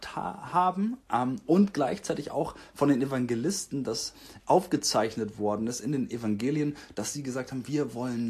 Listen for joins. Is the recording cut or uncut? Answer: cut